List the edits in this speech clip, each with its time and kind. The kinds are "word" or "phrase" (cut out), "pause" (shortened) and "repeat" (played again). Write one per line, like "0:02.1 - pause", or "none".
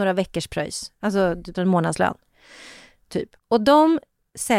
0:01.5 - phrase
0:03.4 - pause